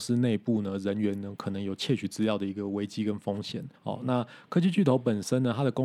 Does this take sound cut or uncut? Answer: cut